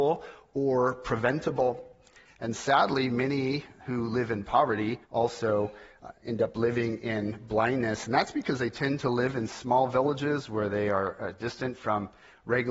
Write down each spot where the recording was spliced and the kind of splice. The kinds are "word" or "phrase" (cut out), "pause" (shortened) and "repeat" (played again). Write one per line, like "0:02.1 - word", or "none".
0:05.0 - pause